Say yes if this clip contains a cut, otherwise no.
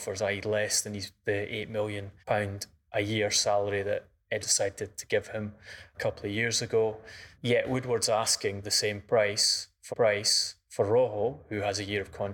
yes